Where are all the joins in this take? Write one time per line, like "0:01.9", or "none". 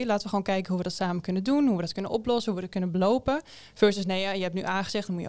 none